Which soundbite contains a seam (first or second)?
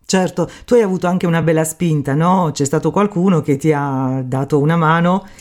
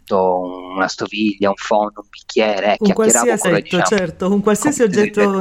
second